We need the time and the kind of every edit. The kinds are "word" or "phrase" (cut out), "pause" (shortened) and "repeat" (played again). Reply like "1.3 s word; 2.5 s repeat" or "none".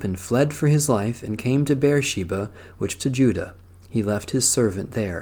3.0 s word